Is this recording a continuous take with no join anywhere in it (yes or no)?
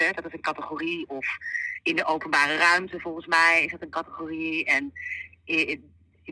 yes